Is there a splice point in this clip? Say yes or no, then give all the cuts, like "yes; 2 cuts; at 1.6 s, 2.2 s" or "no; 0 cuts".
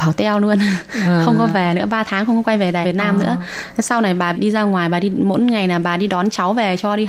yes; 2 cuts; at 2.8 s, 4.3 s